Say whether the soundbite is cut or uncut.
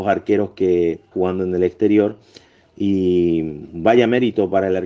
cut